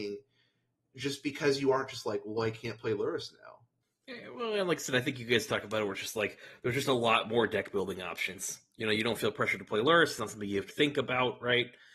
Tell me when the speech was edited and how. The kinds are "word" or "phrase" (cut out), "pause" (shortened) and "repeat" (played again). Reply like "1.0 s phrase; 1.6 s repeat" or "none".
10.7 s word

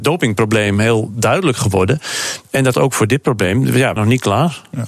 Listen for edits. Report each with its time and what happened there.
2.7 s word; 4.0 s phrase

